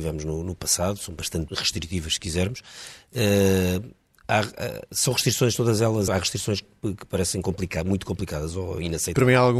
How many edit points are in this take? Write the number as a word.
two